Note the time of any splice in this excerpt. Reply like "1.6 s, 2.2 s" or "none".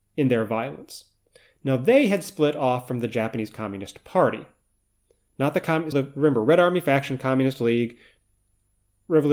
5.9 s